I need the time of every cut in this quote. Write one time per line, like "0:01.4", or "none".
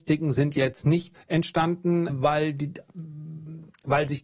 0:01.1
0:02.1